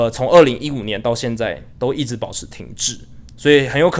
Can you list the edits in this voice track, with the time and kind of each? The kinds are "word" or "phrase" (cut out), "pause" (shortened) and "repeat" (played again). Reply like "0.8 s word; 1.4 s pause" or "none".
1.7 s pause